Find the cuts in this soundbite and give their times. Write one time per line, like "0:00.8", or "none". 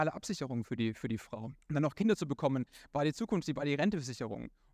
0:01.6